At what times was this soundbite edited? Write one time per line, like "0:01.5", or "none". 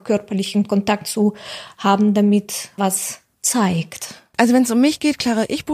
0:02.8